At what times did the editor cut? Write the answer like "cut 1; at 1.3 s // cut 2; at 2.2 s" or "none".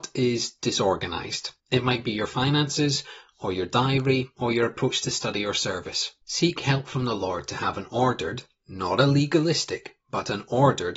cut 1; at 1.6 s // cut 2; at 6.2 s